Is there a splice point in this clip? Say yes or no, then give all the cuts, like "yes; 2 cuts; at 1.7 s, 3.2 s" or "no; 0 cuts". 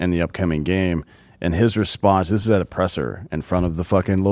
no; 0 cuts